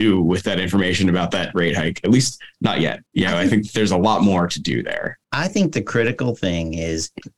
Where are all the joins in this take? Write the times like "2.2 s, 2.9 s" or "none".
3.1 s, 5.2 s